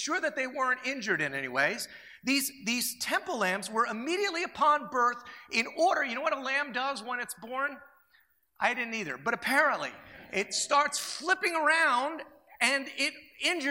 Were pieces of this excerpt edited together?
no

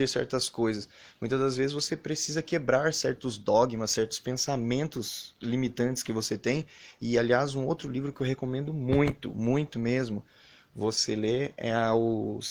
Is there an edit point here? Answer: no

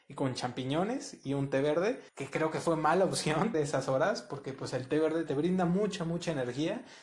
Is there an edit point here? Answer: yes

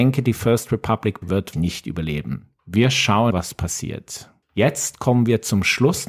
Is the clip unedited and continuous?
no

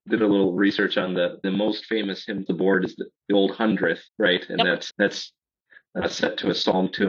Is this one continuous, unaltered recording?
no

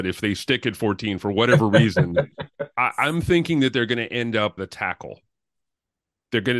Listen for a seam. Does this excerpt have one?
yes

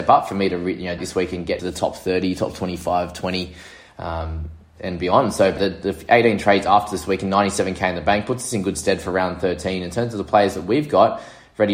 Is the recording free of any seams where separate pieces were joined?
no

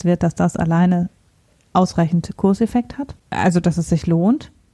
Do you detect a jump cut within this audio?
yes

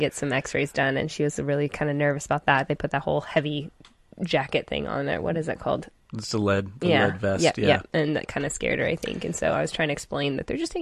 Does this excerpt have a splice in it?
no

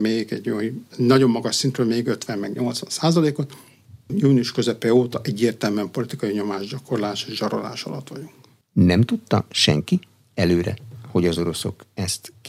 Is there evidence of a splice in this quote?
no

